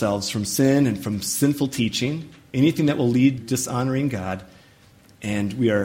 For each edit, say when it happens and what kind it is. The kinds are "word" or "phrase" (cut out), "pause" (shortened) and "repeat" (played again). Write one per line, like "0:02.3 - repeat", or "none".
0:03.4 - word